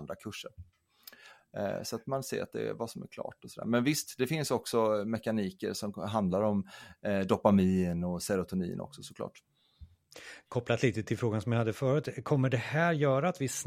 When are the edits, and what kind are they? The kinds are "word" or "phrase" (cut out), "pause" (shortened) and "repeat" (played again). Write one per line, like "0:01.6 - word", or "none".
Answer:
none